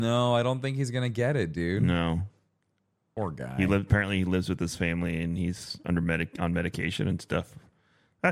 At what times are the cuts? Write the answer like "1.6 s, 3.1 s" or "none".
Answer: none